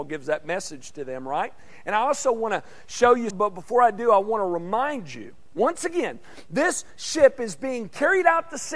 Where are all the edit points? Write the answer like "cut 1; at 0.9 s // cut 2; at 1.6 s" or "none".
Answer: cut 1; at 3.3 s

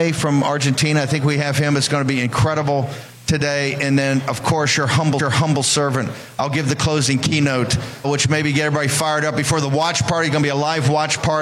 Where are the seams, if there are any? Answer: cut 1; at 5.2 s // cut 2; at 8.0 s

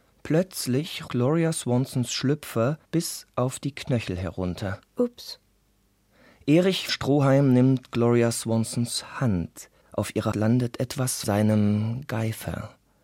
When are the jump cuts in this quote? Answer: cut 1; at 1.1 s // cut 2; at 2.8 s // cut 3; at 4.9 s // cut 4; at 6.9 s // cut 5; at 9.8 s // cut 6; at 10.3 s // cut 7; at 11.2 s

